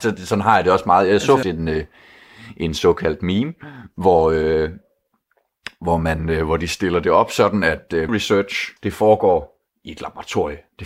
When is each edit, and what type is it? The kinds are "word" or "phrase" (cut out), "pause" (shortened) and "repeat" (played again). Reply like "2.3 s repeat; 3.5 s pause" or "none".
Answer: 1.4 s word; 8.1 s word; 8.8 s pause

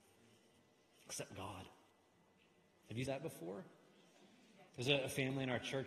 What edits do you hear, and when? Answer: 3.1 s word; 4.7 s pause

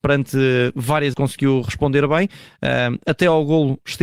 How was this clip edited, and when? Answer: 1.1 s word

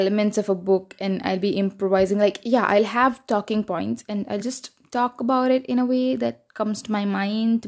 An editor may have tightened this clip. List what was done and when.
none

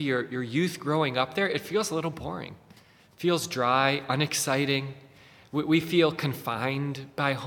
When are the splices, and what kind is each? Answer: none

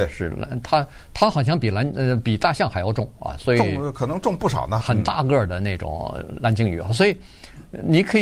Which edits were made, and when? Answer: 4.8 s word

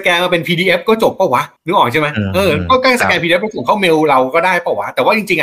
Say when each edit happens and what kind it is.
1.6 s pause

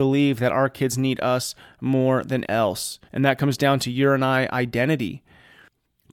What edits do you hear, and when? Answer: 2.4 s word; 3.1 s pause

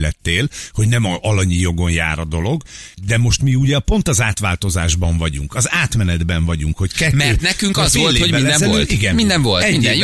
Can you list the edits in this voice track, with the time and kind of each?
2.9 s pause

